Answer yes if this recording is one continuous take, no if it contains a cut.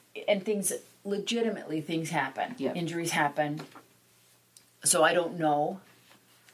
yes